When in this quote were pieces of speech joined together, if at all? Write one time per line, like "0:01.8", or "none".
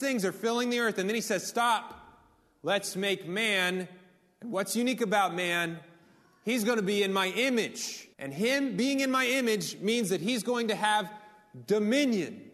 0:08.1

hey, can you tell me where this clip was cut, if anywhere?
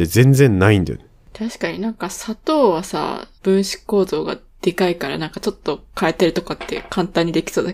0:03.4

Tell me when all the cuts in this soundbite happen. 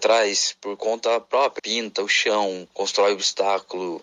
0:01.6

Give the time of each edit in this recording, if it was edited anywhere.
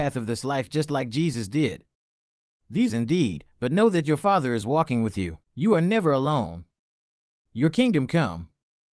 0:02.9
0:05.4

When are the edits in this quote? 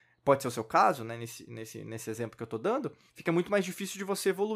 0:03.1

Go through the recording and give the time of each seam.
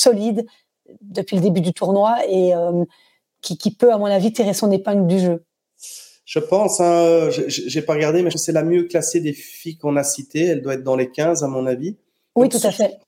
0:08.3

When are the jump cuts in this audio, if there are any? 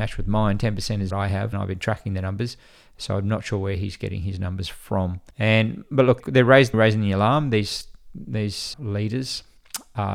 0:01.1
0:01.5
0:05.3
0:06.2
0:06.7
0:08.7

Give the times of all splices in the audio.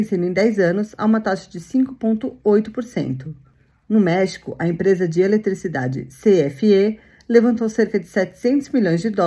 none

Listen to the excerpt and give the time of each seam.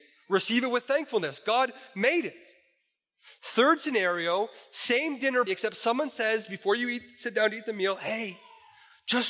0:05.5

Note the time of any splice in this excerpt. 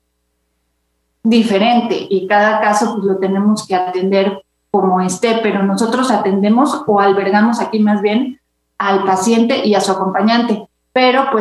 none

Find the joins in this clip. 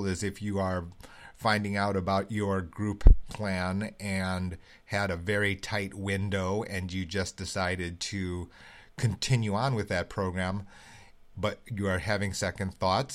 none

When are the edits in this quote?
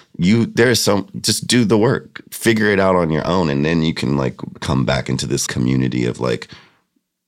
0:05.5

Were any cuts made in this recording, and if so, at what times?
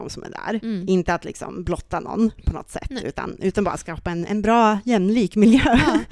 none

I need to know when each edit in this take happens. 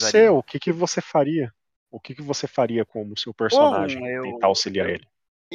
none

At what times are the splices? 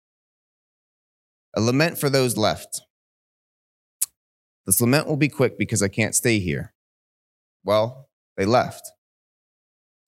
none

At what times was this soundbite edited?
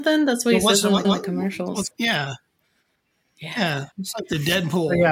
0:01.0
0:01.9
0:03.9

